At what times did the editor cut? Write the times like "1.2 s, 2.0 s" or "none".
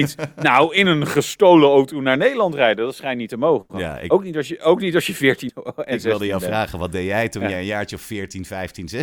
5.5 s